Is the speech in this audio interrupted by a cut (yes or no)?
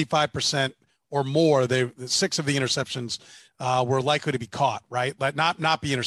no